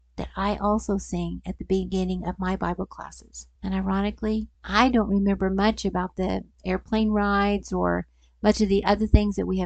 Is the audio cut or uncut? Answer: cut